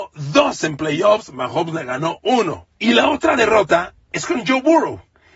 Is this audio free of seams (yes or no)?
no